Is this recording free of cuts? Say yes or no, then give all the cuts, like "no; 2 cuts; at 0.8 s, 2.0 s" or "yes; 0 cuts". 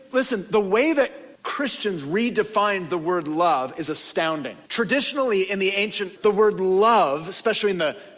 no; 3 cuts; at 1.3 s, 4.7 s, 6.2 s